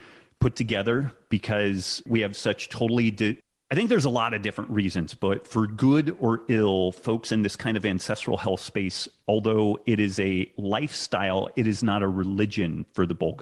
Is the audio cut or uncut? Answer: uncut